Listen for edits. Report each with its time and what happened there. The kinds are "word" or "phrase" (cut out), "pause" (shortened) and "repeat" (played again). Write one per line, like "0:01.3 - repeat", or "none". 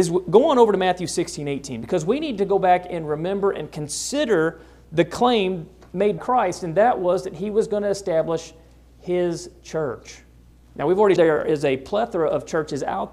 0:06.2 - word
0:11.2 - word